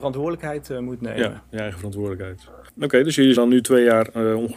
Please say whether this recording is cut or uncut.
cut